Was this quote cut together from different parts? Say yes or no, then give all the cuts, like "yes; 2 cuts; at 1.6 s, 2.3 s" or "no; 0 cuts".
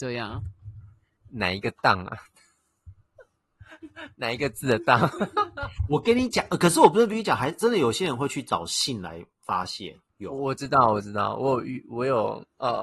yes; 1 cut; at 10.1 s